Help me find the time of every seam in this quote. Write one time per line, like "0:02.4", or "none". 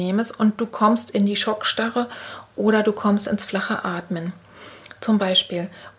none